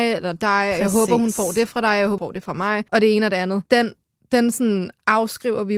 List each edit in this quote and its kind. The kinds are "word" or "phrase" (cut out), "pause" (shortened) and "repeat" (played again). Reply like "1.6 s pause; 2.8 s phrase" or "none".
2.2 s word; 2.9 s pause; 3.7 s pause